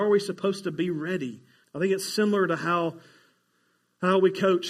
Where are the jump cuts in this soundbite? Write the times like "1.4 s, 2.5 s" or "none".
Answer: 1.6 s